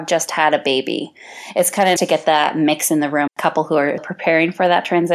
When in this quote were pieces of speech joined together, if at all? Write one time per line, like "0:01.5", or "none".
0:02.0
0:03.3
0:04.0